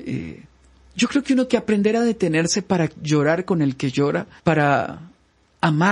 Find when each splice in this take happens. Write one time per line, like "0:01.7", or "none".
0:01.5
0:04.4